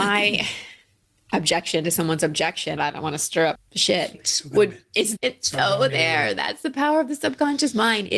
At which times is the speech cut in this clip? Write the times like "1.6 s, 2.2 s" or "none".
2.8 s, 3.5 s, 4.1 s, 4.7 s, 5.2 s

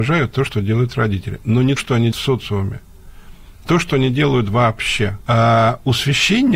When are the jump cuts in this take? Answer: 1.8 s, 2.1 s, 3.6 s, 5.2 s

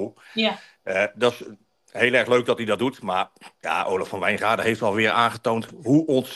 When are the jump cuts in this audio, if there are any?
3.5 s

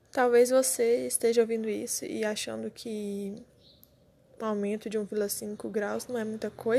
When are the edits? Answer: none

